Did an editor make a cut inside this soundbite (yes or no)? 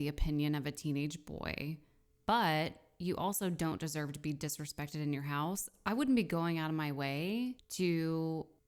no